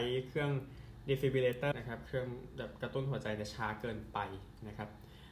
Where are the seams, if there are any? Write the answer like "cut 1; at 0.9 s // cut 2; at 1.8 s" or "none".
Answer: cut 1; at 1.7 s